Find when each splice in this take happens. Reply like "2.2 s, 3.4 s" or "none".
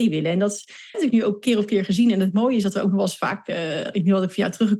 0.9 s, 3.9 s